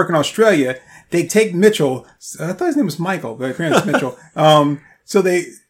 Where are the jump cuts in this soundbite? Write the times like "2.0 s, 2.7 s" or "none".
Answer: 1.3 s